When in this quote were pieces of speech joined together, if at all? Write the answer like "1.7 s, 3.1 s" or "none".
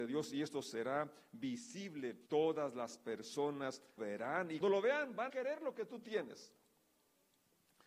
2.3 s, 4.0 s, 4.6 s, 5.3 s